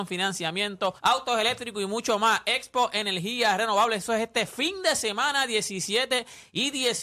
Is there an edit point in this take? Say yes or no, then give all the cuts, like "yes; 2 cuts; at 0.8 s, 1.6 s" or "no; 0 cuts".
yes; 1 cut; at 1.0 s